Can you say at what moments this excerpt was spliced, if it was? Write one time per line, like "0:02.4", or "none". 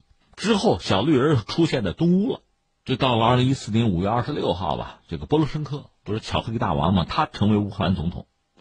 none

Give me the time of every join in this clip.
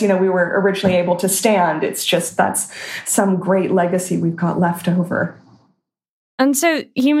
none

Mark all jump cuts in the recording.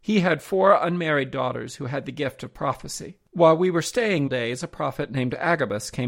0:03.3
0:04.3

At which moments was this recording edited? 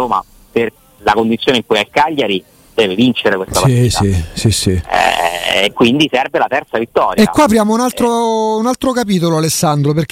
none

